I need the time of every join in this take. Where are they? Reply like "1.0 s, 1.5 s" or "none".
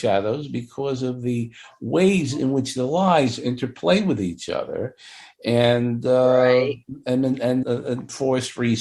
7.6 s